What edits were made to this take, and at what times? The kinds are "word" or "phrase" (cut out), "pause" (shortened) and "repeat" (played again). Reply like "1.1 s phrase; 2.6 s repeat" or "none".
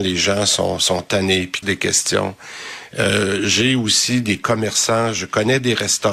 1.6 s phrase